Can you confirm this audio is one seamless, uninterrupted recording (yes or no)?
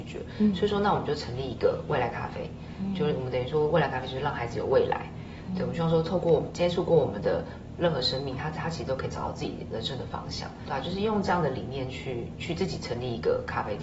no